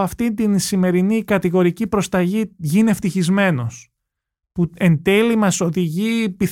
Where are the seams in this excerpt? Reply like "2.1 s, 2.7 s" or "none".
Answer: none